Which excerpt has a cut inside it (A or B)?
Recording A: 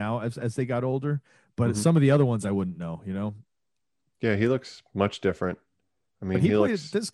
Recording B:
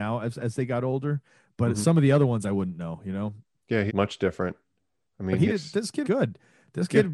B